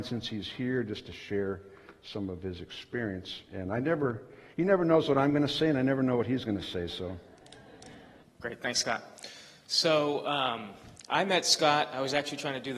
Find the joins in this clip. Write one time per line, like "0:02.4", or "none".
0:08.2